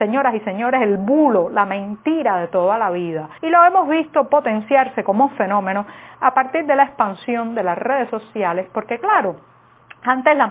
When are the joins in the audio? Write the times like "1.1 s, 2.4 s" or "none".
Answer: 3.4 s